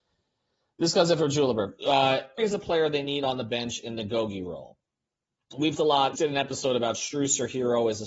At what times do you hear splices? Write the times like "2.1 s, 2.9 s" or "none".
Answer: 2.4 s, 5.8 s, 6.2 s